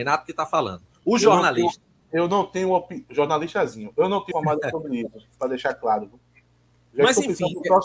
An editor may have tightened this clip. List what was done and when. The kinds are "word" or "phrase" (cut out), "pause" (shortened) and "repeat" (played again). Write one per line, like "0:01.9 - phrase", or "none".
0:04.3 - word